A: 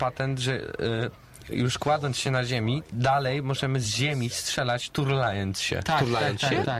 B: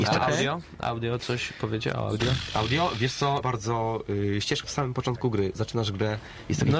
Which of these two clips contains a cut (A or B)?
B